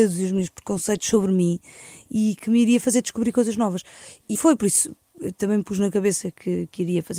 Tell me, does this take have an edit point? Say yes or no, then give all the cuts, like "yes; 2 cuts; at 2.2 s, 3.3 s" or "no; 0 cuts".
yes; 1 cut; at 4.3 s